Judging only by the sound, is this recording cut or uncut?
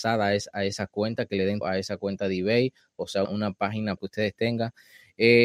cut